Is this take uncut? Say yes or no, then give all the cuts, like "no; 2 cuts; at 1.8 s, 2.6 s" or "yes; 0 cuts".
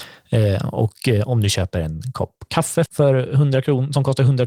no; 1 cut; at 2.9 s